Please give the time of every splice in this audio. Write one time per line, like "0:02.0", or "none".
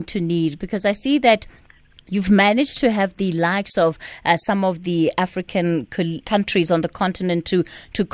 0:06.2